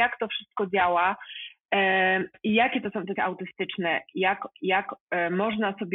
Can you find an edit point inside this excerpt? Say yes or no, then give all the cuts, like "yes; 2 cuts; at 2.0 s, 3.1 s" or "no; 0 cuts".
yes; 2 cuts; at 3.2 s, 4.5 s